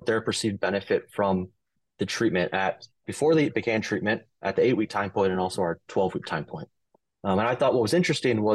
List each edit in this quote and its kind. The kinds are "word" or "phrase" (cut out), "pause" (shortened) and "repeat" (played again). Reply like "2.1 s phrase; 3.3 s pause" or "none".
none

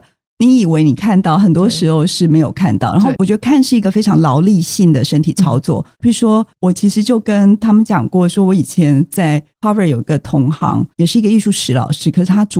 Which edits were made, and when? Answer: 5.9 s pause; 9.5 s pause; 10.9 s pause

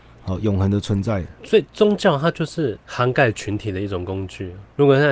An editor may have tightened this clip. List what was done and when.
1.7 s pause

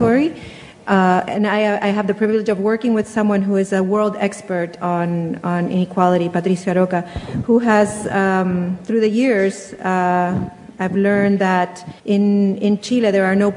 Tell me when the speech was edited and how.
12.0 s pause

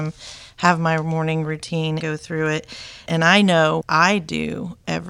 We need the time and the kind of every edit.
2.0 s word; 3.1 s word; 3.8 s word

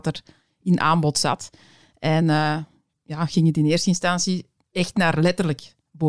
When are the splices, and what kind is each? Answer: none

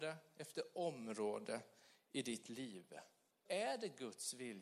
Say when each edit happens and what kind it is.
3.5 s word

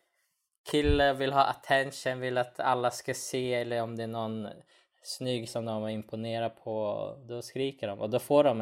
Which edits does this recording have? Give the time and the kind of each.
5.5 s word

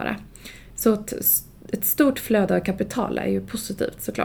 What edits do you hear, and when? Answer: none

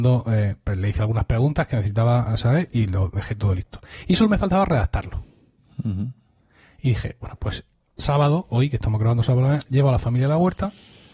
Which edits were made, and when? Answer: none

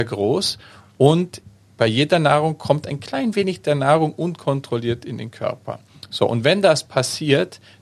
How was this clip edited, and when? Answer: none

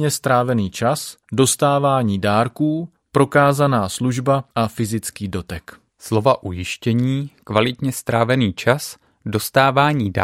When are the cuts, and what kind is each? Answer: 1.2 s pause; 3.0 s pause; 4.5 s pause; 5.9 s pause

